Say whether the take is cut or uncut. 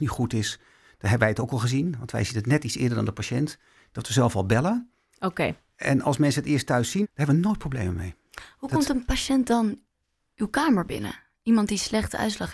uncut